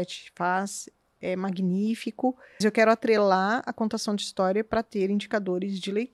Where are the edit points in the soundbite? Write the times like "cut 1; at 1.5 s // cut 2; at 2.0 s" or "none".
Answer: cut 1; at 2.6 s

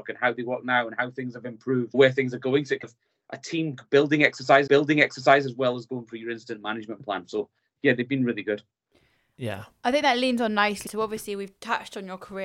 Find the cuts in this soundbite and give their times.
cut 1; at 1.9 s // cut 2; at 2.8 s // cut 3; at 4.7 s // cut 4; at 10.9 s

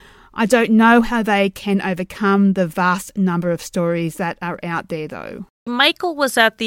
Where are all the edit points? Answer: none

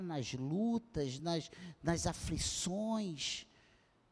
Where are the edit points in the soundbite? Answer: none

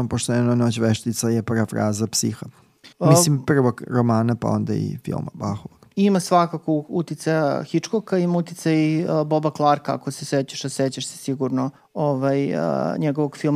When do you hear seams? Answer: cut 1; at 2.9 s // cut 2; at 11.8 s

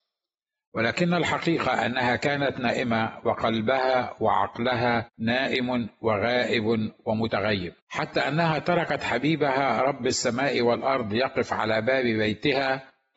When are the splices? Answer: cut 1; at 5.1 s // cut 2; at 7.8 s

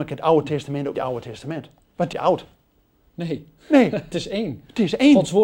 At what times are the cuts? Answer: cut 1; at 0.9 s // cut 2; at 1.8 s // cut 3; at 2.1 s // cut 4; at 4.1 s

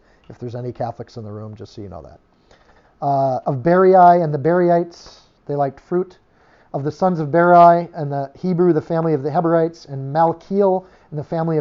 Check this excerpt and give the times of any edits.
none

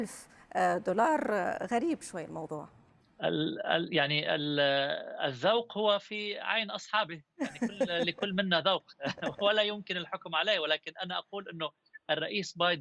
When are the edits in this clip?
none

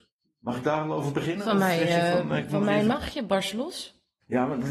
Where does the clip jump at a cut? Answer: none

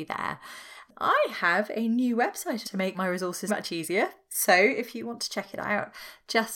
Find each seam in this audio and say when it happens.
cut 1; at 2.6 s // cut 2; at 2.9 s // cut 3; at 3.5 s

